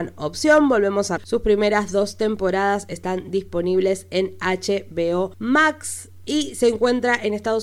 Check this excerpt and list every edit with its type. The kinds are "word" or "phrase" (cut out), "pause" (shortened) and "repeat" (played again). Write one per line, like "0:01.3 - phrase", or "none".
0:01.2 - word